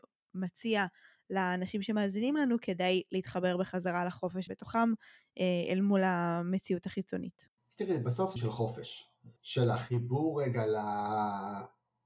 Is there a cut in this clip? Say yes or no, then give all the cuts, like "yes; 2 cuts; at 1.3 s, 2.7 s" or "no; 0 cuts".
yes; 3 cuts; at 4.5 s, 8.4 s, 9.4 s